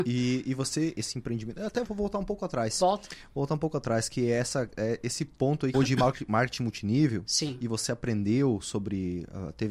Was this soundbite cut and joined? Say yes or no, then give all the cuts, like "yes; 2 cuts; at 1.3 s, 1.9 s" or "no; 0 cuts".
yes; 3 cuts; at 0.9 s, 1.8 s, 5.7 s